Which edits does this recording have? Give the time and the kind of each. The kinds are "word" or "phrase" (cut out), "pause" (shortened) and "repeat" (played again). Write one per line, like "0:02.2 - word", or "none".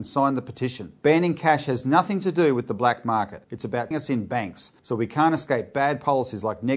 0:03.9 - word